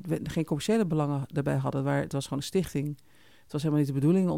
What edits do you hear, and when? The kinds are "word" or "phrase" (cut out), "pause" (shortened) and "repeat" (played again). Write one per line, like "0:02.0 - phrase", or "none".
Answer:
none